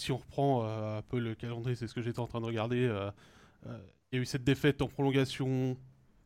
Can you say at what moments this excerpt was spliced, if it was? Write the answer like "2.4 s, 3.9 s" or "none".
none